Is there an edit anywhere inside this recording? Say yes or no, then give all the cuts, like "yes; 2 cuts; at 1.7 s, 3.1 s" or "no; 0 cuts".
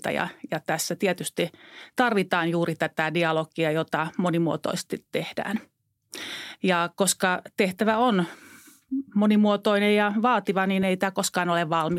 no; 0 cuts